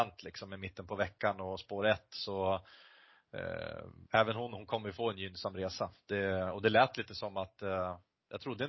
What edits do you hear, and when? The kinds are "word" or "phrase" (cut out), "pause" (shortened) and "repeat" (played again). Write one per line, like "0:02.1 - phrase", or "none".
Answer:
0:04.1 - pause